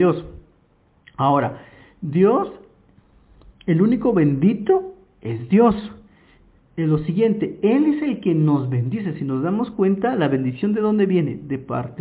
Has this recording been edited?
no; 0 cuts

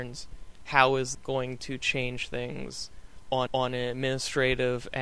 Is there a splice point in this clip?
yes; 2 cuts; at 1.1 s, 3.5 s

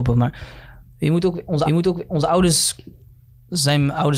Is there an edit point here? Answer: yes; 1 cut; at 1.7 s

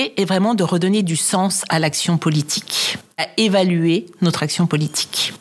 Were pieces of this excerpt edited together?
yes; 1 cut; at 3.2 s

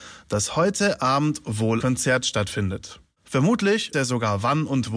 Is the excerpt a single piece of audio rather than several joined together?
no; 2 cuts; at 1.8 s, 3.9 s

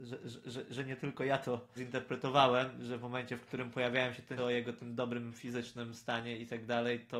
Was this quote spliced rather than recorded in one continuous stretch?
yes; 2 cuts; at 1.8 s, 4.4 s

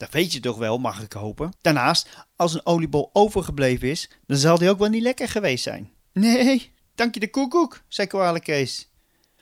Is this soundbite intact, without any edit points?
no; 2 cuts; at 1.6 s, 6.0 s

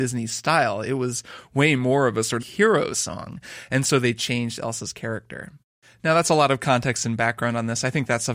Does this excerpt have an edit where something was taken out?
yes; 1 cut; at 2.4 s

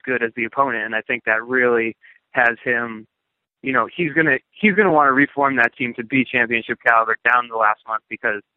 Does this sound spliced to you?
no; 0 cuts

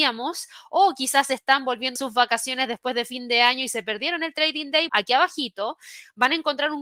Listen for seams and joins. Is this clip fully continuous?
no; 2 cuts; at 2.0 s, 4.9 s

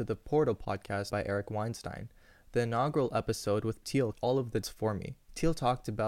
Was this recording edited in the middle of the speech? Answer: yes; 4 cuts; at 1.1 s, 3.8 s, 4.1 s, 4.6 s

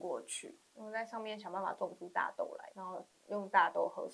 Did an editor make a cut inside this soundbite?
yes; 1 cut; at 2.7 s

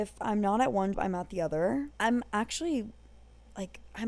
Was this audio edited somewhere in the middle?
yes; 2 cuts; at 0.9 s, 1.9 s

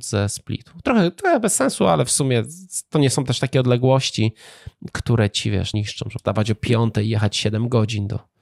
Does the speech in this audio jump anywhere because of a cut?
yes; 2 cuts; at 5.7 s, 6.2 s

